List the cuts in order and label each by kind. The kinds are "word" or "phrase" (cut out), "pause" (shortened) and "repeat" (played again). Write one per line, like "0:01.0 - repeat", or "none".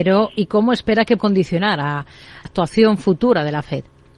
0:01.2 - word
0:02.4 - word